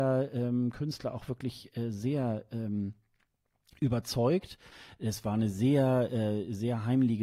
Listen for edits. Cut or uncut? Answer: uncut